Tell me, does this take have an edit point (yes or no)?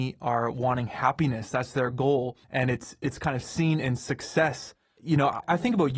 yes